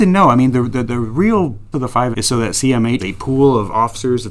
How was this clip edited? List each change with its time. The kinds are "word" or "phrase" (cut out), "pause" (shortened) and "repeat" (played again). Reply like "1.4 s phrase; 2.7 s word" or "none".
1.7 s word; 2.1 s word; 3.0 s word